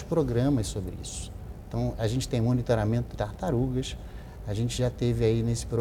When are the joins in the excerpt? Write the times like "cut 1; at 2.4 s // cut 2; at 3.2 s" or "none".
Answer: cut 1; at 2.0 s // cut 2; at 3.1 s